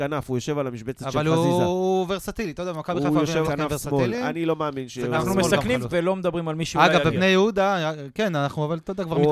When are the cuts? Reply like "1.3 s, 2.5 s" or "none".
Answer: 3.4 s, 5.9 s